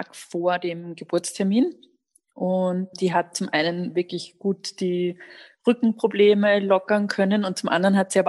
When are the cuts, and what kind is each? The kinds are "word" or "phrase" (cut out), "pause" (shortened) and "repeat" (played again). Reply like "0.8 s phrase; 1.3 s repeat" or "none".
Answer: 2.9 s word

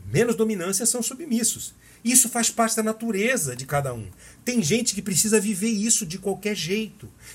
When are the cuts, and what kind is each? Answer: none

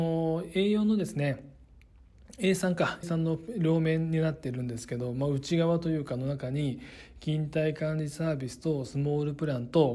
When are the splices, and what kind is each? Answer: 3.0 s word

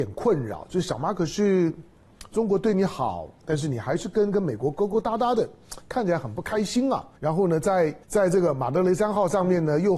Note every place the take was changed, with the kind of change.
7.2 s pause; 8.0 s pause

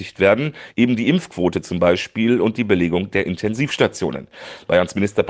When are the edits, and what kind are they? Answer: none

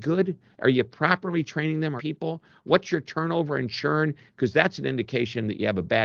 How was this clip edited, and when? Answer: 2.0 s phrase

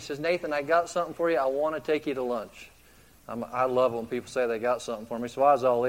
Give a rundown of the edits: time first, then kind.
none

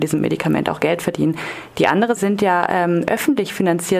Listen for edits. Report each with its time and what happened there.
2.2 s word

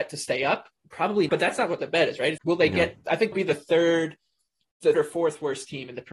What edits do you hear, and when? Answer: 1.3 s word; 2.4 s word; 3.3 s word; 4.9 s word

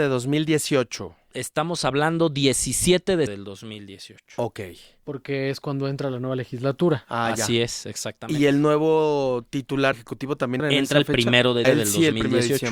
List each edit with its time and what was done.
3.3 s word; 9.9 s word; 10.6 s word; 11.6 s word

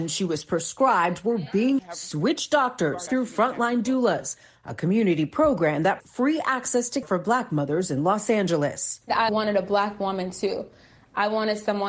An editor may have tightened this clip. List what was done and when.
1.8 s word; 3.1 s phrase; 6.0 s word; 7.0 s word; 9.3 s word

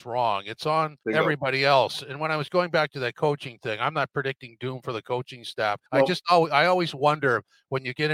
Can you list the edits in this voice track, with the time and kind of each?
1.0 s pause; 5.9 s pause

